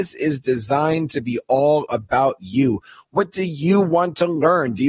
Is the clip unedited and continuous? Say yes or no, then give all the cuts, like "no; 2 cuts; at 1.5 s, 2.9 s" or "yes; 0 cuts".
yes; 0 cuts